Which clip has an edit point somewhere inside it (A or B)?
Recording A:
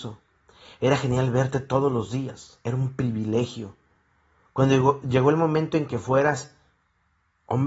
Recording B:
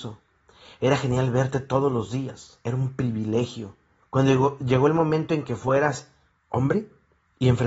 B